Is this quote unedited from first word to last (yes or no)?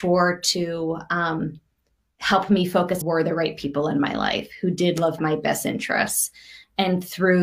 no